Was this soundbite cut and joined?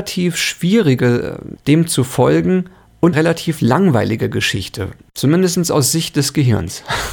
yes; 2 cuts; at 1.6 s, 3.1 s

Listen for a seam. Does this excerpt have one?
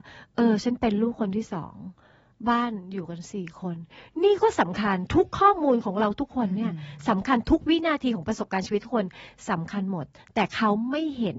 no; 0 cuts

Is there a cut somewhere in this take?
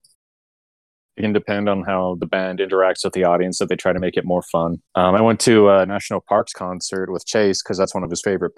yes; 1 cut; at 4.9 s

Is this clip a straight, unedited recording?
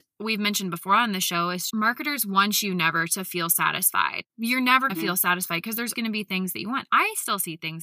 no; 4 cuts; at 1.7 s, 4.3 s, 4.9 s, 5.9 s

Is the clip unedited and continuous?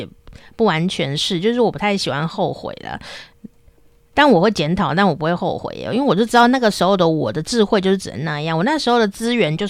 yes; 0 cuts

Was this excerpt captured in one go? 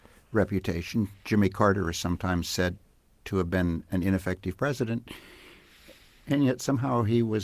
yes; 0 cuts

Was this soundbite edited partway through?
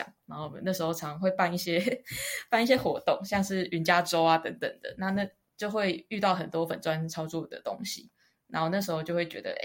no; 0 cuts

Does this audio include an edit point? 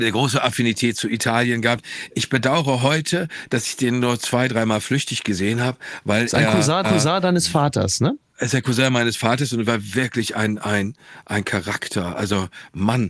yes; 1 cut; at 6.8 s

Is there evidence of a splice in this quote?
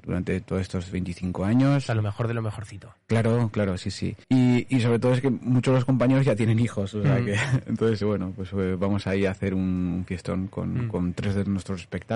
yes; 3 cuts; at 0.9 s, 4.2 s, 8.0 s

